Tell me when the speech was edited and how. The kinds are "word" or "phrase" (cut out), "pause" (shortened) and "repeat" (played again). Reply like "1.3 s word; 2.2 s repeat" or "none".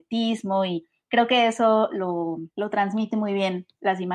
2.5 s pause